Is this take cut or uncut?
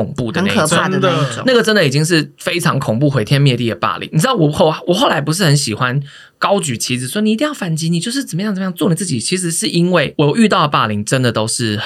uncut